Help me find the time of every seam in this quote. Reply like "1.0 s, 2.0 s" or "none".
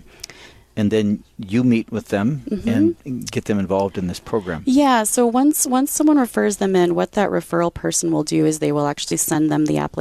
3.0 s